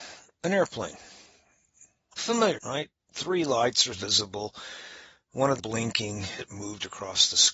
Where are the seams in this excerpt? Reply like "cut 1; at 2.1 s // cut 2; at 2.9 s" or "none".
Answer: cut 1; at 2.5 s // cut 2; at 2.9 s // cut 3; at 3.9 s // cut 4; at 5.6 s // cut 5; at 6.4 s